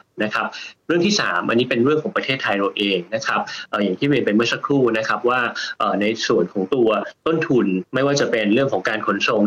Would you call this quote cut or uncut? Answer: cut